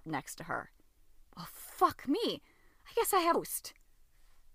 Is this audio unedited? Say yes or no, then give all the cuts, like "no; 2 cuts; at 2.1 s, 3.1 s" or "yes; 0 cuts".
no; 2 cuts; at 1.3 s, 3.3 s